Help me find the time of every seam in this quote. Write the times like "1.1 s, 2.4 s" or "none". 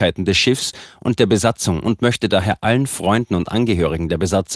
none